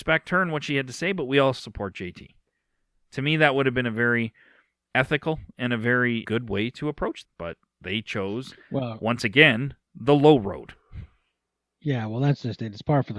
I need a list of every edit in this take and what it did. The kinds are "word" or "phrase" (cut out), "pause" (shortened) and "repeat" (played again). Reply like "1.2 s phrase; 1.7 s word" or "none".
1.6 s word; 6.2 s word; 7.2 s word